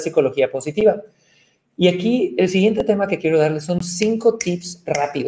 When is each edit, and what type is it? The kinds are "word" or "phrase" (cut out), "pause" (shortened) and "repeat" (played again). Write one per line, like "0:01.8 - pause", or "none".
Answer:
none